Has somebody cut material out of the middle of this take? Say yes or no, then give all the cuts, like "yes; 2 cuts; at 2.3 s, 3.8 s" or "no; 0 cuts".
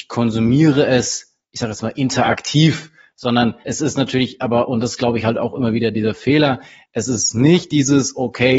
yes; 1 cut; at 3.6 s